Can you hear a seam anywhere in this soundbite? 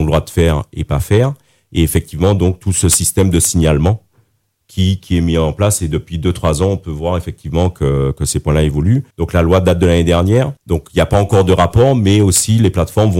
yes; 2 cuts; at 9.1 s, 10.6 s

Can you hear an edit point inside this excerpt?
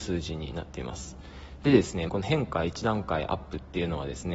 yes; 1 cut; at 2.1 s

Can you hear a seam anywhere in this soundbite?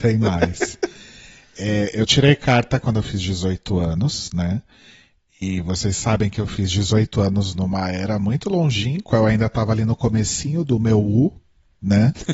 no; 0 cuts

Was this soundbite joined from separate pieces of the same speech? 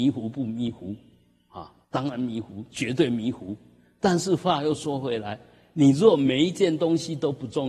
yes; 1 cut; at 1.8 s

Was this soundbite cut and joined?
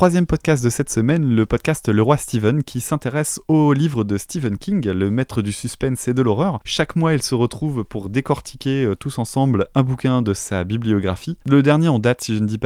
no; 0 cuts

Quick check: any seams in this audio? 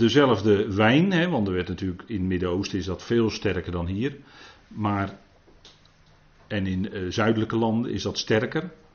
no; 0 cuts

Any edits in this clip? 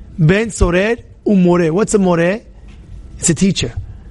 no; 0 cuts

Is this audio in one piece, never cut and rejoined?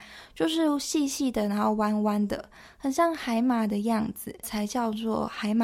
no; 1 cut; at 4.4 s

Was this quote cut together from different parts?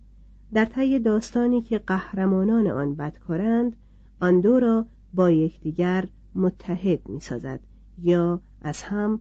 no; 0 cuts

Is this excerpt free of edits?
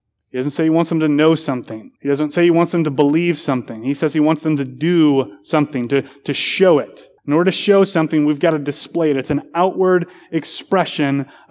no; 2 cuts; at 2.0 s, 7.2 s

